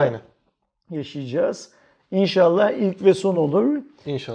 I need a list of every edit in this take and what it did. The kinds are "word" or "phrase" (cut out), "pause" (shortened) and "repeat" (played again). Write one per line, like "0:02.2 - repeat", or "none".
none